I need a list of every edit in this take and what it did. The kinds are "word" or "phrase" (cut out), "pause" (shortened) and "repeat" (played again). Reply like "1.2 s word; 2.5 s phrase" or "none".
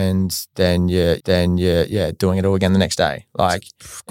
1.2 s repeat